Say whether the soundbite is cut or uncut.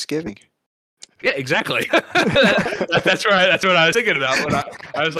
uncut